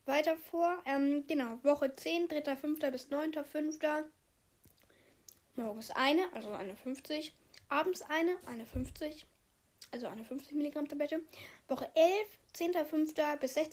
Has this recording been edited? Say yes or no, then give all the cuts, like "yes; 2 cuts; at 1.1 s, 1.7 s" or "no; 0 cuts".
no; 0 cuts